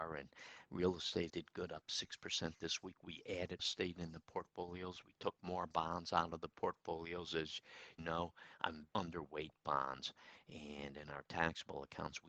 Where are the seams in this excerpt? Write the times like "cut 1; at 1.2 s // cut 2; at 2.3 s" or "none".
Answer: cut 1; at 1.3 s // cut 2; at 3.6 s // cut 3; at 8.0 s // cut 4; at 8.9 s